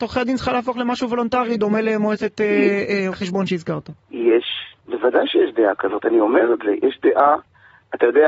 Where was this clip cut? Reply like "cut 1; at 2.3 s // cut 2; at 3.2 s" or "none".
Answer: cut 1; at 3.1 s // cut 2; at 4.0 s